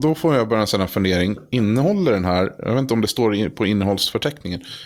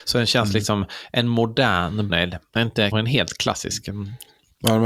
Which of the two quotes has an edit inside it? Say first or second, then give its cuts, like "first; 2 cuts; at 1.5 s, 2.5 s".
second; 2 cuts; at 2.1 s, 2.9 s